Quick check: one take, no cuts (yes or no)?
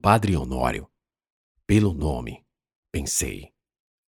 yes